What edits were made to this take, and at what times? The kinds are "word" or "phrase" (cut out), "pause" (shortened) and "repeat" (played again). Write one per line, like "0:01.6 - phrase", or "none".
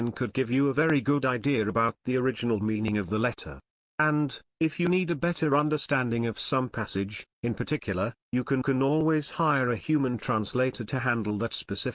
0:08.6 - repeat